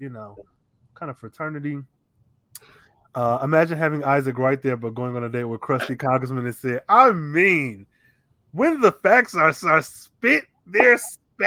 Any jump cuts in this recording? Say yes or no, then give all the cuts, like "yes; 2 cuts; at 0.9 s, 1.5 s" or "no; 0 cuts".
yes; 1 cut; at 9.6 s